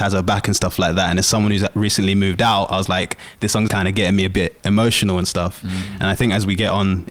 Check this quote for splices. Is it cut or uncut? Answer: cut